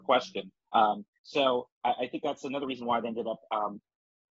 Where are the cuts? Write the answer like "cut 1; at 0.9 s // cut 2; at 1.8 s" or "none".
none